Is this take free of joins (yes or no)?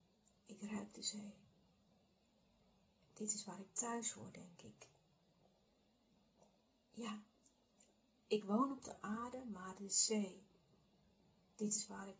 yes